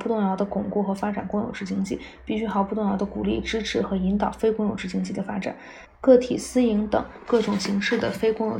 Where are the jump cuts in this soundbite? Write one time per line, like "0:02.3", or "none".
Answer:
0:05.9